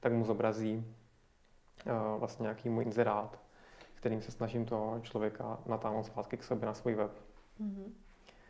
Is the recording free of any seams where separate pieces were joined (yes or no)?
yes